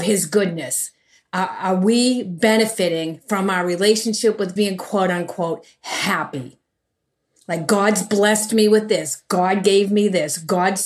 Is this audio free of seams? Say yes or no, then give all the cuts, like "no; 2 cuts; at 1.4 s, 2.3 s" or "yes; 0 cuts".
no; 1 cut; at 4.6 s